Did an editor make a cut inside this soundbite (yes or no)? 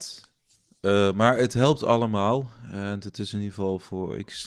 no